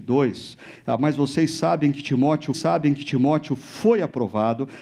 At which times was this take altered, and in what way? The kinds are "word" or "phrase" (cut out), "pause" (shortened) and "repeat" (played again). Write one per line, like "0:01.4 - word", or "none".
0:02.5 - repeat